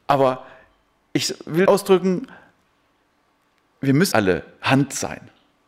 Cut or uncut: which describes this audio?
cut